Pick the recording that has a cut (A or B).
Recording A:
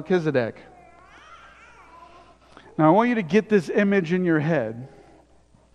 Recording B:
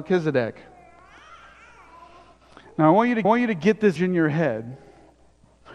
B